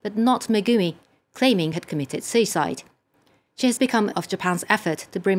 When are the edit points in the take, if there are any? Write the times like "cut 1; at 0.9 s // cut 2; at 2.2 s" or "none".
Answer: cut 1; at 1.7 s // cut 2; at 3.8 s // cut 3; at 4.1 s